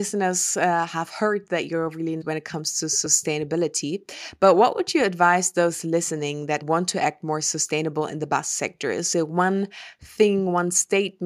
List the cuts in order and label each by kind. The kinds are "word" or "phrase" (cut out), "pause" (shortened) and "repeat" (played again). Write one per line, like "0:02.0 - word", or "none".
0:02.2 - word
0:06.6 - word